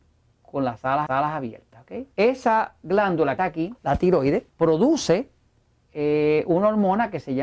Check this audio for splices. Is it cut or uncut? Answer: cut